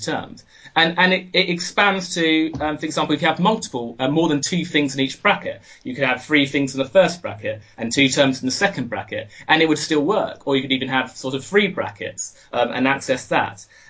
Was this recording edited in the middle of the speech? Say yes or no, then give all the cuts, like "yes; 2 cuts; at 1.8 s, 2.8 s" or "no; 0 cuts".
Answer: no; 0 cuts